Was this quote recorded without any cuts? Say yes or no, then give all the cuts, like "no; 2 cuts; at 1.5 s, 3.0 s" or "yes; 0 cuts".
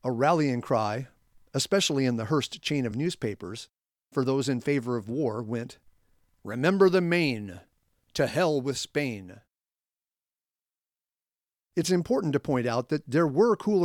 yes; 0 cuts